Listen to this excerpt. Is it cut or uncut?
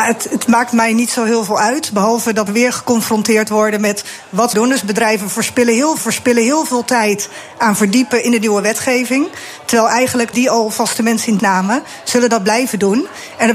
cut